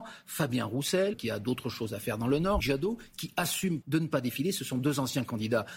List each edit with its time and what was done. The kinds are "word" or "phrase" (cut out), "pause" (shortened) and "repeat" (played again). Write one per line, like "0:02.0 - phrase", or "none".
0:01.1 - word
0:02.6 - word
0:03.8 - word